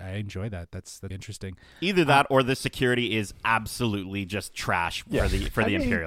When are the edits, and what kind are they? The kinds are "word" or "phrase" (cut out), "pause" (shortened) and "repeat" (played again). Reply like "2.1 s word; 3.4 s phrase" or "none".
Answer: 1.1 s word